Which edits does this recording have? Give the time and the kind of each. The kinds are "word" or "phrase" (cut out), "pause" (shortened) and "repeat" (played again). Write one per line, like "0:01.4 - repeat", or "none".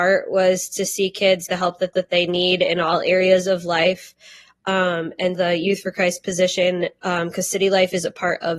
0:01.5 - word
0:01.9 - repeat
0:05.4 - word